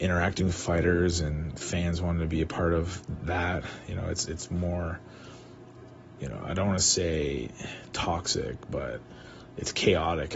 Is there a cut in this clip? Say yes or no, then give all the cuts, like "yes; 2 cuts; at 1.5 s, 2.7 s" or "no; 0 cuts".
no; 0 cuts